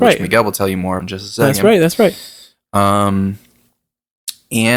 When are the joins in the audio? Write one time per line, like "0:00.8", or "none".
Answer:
0:01.0